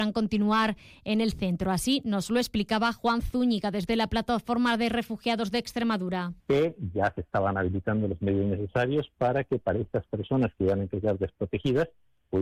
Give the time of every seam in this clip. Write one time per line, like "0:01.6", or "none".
0:06.4